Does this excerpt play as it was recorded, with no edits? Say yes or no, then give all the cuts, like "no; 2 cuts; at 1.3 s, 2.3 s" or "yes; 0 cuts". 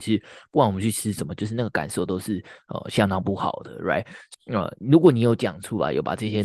no; 1 cut; at 4.3 s